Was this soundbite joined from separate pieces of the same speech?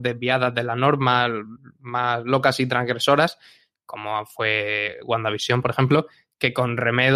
no; 0 cuts

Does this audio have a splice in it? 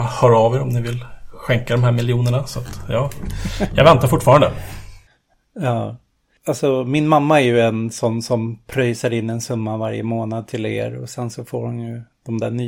no; 0 cuts

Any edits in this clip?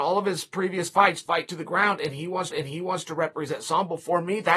yes; 2 cuts; at 1.2 s, 2.5 s

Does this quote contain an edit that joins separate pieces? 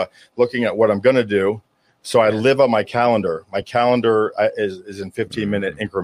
no; 0 cuts

